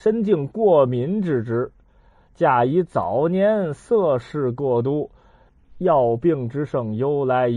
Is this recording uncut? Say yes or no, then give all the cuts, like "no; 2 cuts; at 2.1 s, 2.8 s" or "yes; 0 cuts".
yes; 0 cuts